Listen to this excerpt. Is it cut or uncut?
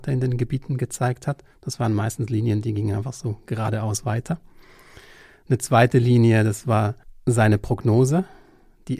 uncut